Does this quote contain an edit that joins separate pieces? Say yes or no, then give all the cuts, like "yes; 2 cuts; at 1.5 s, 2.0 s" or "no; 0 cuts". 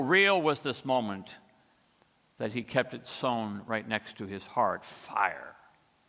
no; 0 cuts